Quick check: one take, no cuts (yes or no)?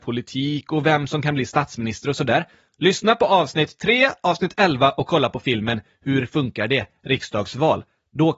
yes